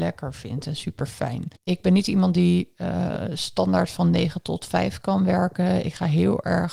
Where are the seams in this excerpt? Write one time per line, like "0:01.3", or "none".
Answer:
0:01.6